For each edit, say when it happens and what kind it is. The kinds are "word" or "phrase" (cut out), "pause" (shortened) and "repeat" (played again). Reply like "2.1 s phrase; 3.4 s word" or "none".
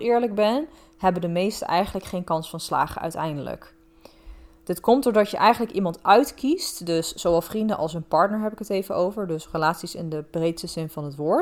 none